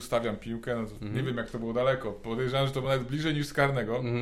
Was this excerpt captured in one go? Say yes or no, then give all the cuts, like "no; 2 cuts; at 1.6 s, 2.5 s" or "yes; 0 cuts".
yes; 0 cuts